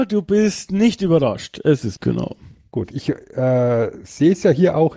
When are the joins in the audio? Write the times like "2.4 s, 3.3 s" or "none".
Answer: 2.0 s, 2.9 s